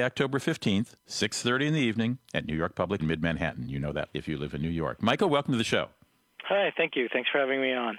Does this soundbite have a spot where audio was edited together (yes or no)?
yes